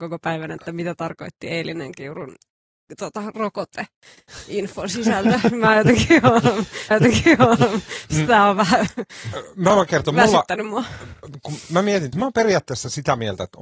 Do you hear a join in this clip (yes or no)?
yes